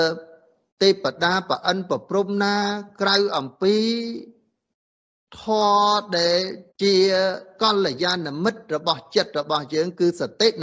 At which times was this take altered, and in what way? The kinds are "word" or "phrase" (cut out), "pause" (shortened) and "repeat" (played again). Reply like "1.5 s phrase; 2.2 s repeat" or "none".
6.7 s pause